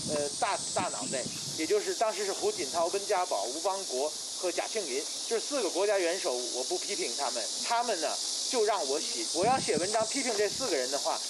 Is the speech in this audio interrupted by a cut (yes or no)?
yes